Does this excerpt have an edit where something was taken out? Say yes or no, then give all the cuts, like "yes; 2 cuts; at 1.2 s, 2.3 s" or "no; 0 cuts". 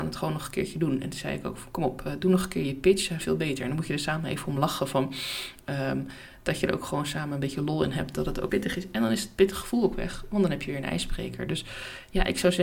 yes; 2 cuts; at 3.2 s, 8.5 s